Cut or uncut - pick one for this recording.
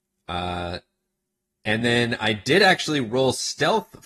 uncut